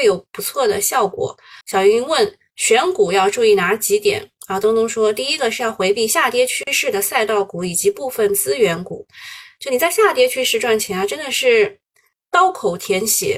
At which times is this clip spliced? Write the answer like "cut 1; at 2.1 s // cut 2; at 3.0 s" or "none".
cut 1; at 1.6 s

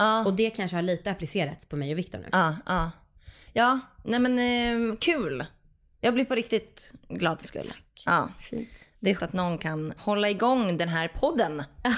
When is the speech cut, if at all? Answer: cut 1; at 7.4 s // cut 2; at 9.2 s // cut 3; at 10.0 s

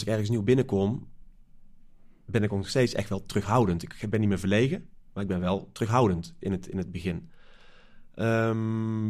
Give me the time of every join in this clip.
none

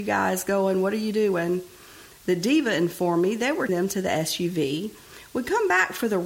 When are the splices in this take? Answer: cut 1; at 3.7 s

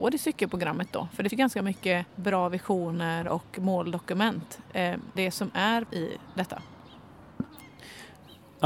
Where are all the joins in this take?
cut 1; at 1.3 s // cut 2; at 2.1 s // cut 3; at 5.2 s // cut 4; at 5.9 s

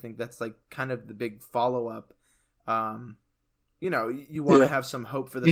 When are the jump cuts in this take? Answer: none

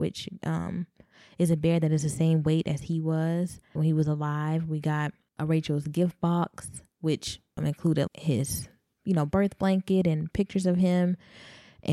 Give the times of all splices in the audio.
cut 1; at 3.8 s // cut 2; at 8.1 s

